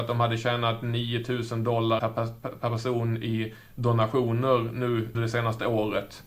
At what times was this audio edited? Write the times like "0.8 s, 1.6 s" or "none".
2.0 s, 5.1 s